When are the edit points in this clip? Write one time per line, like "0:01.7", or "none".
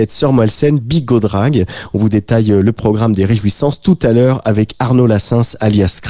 none